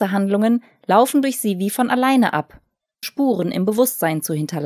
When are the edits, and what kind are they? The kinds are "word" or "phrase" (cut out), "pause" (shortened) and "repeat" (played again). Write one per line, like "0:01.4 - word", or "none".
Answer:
0:03.0 - phrase

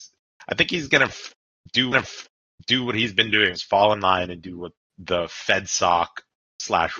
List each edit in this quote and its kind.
0:01.9 - repeat
0:03.6 - word
0:04.8 - word

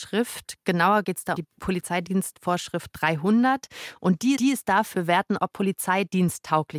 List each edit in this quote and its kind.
0:01.0 - word
0:01.4 - word
0:04.4 - repeat
0:04.9 - phrase
0:05.5 - word

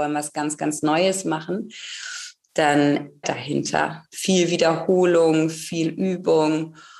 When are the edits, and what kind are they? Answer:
0:03.2 - phrase

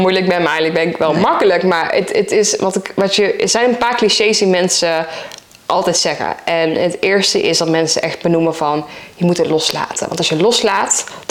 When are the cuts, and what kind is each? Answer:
none

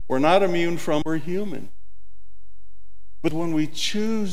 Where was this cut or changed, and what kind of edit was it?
0:01.0 - word
0:03.3 - phrase

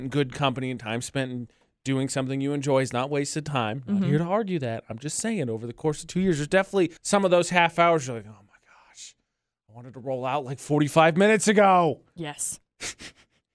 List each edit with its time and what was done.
0:07.0 - pause

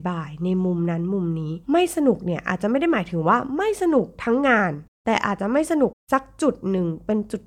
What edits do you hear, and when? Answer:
0:01.6 - pause

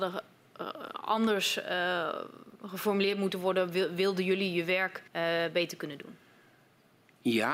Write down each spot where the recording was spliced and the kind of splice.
0:05.1 - pause

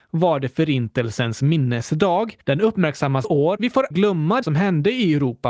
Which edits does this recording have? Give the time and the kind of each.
0:02.4 - pause
0:03.2 - word
0:03.6 - word
0:03.9 - word
0:04.4 - word

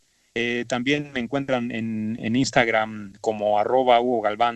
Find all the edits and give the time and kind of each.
none

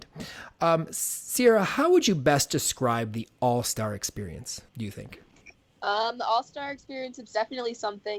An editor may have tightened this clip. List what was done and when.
0:04.7 - pause
0:05.6 - pause

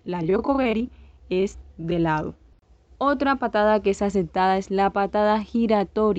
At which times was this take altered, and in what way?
none

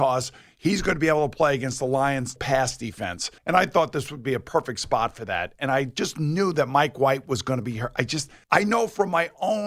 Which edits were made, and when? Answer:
0:02.4 - word
0:03.4 - pause

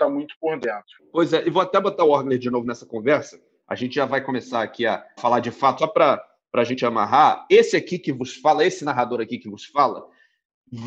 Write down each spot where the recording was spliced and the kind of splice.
0:05.2 - word
0:05.8 - phrase

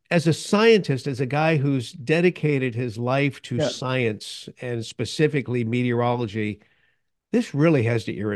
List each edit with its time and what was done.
none

